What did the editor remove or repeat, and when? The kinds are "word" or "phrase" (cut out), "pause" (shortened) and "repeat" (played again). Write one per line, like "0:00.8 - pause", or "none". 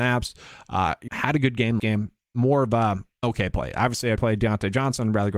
0:01.1 - word
0:01.8 - word
0:03.2 - word
0:04.2 - word